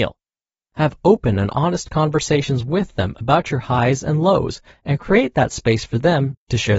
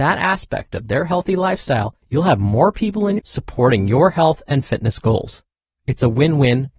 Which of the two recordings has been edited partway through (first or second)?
second